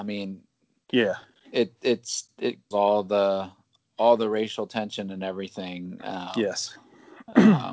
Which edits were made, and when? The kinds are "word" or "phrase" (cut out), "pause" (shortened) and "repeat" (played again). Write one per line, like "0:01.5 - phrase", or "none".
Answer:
0:02.7 - phrase